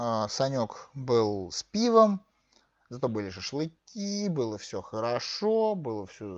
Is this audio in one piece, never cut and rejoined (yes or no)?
yes